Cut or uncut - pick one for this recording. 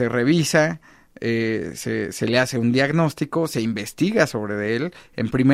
uncut